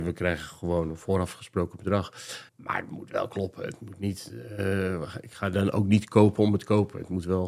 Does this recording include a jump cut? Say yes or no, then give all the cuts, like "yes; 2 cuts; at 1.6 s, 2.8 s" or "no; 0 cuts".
yes; 1 cut; at 2.5 s